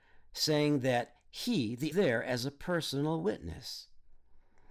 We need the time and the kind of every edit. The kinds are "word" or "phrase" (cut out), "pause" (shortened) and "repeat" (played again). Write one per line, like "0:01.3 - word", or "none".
0:01.9 - phrase